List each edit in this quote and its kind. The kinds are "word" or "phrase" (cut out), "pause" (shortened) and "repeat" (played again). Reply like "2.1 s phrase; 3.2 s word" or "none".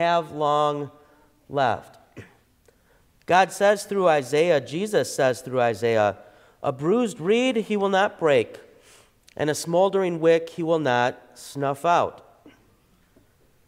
none